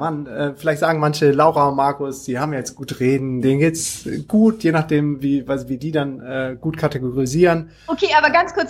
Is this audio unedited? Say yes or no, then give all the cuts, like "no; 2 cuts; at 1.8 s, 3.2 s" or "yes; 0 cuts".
yes; 0 cuts